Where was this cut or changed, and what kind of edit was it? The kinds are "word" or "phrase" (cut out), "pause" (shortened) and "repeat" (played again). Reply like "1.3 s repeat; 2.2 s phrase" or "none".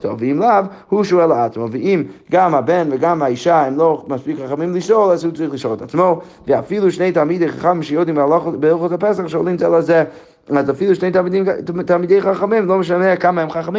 none

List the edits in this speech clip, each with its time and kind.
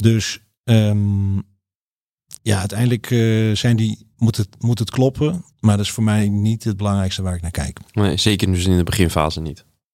2.4 s pause; 4.1 s pause; 5.5 s pause

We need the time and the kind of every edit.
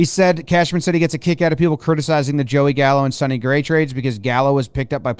none

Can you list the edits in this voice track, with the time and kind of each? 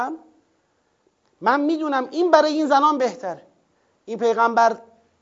3.7 s pause

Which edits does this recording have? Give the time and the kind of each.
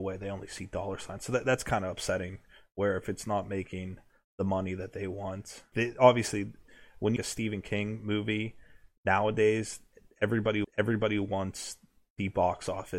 5.7 s word; 7.2 s phrase; 10.6 s repeat

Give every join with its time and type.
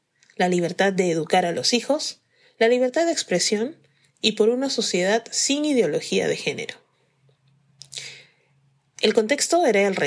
none

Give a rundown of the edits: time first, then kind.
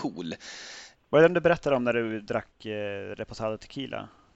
none

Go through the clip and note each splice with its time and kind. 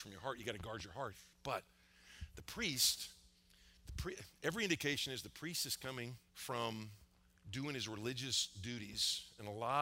1.3 s pause; 3.8 s pause; 6.3 s pause

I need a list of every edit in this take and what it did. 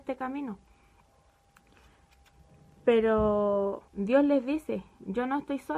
3.9 s pause

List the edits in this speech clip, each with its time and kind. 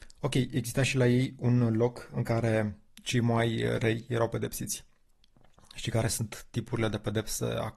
none

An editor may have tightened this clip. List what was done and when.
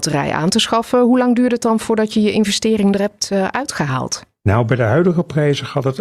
none

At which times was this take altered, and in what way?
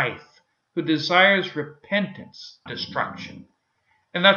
2.7 s word

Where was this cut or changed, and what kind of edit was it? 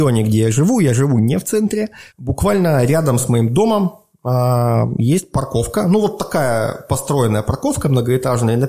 2.1 s pause

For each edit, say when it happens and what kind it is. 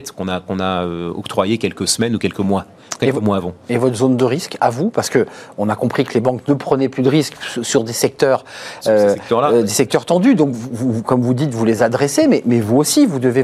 none

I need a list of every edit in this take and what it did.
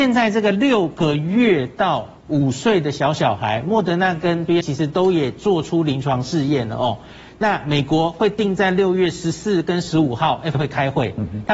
2.2 s pause; 4.6 s phrase; 10.5 s word

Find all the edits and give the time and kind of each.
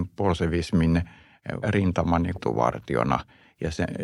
1.6 s word; 2.3 s word

